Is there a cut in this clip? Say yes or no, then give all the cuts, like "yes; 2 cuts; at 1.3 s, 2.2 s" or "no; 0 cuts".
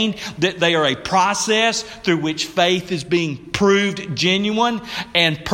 no; 0 cuts